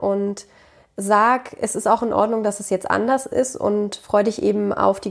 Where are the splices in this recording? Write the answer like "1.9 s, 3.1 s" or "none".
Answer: none